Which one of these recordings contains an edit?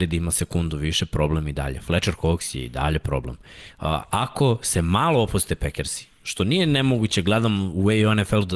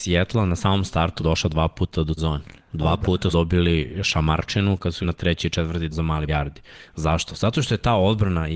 second; 6 cuts; at 1.2 s, 2.2 s, 3.3 s, 5.0 s, 5.9 s, 6.3 s

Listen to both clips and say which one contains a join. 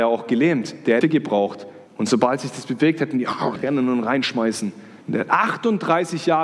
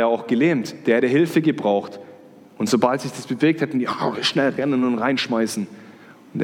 first; 4 cuts; at 1.0 s, 1.9 s, 3.6 s, 5.0 s

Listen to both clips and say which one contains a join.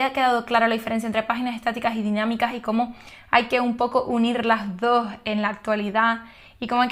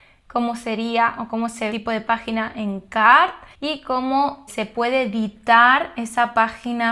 second; 3 cuts; at 1.7 s, 3.5 s, 4.5 s

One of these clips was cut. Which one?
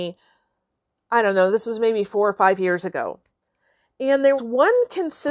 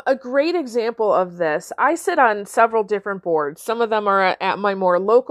first; 1 cut; at 4.4 s

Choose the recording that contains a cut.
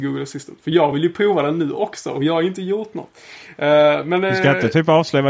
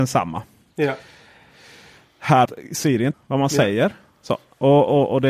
second; 2 cuts; at 2.5 s, 3.1 s

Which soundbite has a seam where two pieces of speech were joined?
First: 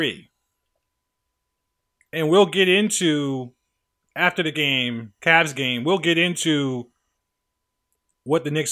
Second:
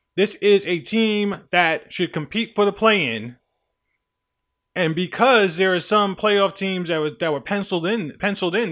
first; 1 cut; at 4.5 s

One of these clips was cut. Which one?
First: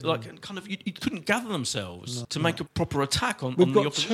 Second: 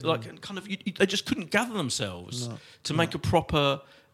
first; 3 cuts; at 1.0 s, 2.2 s, 2.7 s

